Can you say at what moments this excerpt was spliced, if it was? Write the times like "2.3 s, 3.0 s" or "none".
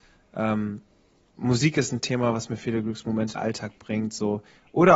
3.4 s